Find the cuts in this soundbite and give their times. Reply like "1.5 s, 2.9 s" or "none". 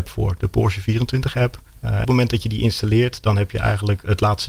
1.7 s, 2.0 s